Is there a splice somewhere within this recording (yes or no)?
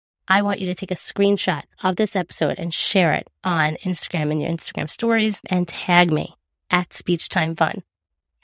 no